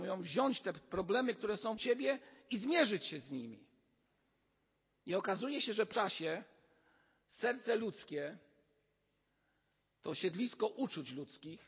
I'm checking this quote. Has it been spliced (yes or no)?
yes